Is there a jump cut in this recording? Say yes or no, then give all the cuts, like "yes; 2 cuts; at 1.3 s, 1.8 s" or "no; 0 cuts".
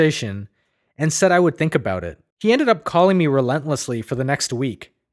yes; 1 cut; at 2.3 s